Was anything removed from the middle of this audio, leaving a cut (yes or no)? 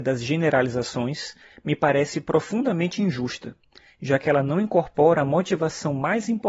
no